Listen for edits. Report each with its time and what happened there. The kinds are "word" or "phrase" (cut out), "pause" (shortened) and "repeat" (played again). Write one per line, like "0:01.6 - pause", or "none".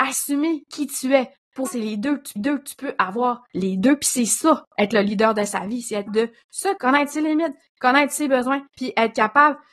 0:01.7 - word
0:02.4 - repeat
0:03.5 - pause
0:06.1 - word
0:06.8 - word
0:08.7 - pause